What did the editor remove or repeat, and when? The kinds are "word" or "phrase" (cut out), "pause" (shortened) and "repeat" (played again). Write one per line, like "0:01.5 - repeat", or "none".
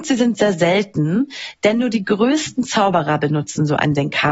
none